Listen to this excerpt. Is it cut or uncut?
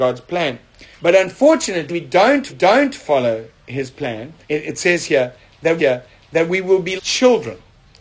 cut